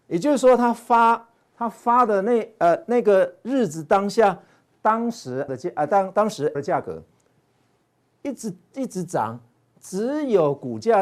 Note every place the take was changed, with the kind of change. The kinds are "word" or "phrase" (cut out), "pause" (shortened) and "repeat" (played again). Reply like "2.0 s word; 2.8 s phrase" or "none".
5.5 s word; 6.5 s word